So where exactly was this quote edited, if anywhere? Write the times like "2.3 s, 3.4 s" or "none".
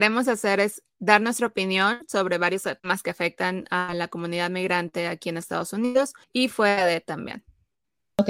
2.8 s, 6.2 s